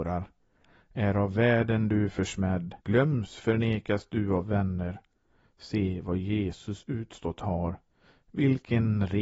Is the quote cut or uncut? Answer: cut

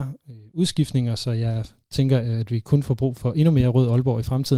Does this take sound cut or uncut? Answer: uncut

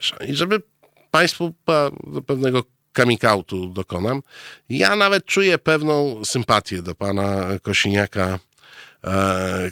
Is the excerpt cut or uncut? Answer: uncut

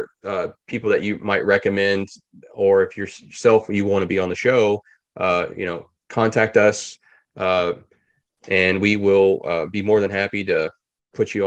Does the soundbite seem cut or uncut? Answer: uncut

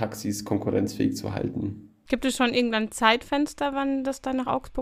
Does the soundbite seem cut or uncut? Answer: uncut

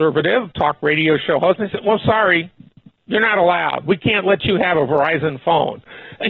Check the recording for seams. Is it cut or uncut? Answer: uncut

